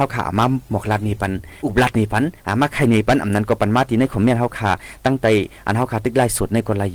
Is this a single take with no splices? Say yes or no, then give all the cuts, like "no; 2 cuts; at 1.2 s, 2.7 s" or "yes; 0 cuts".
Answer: no; 2 cuts; at 1.6 s, 2.4 s